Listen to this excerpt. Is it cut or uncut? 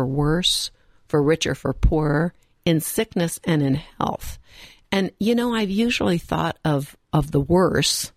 uncut